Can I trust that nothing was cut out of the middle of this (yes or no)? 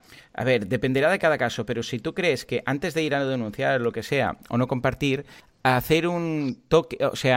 yes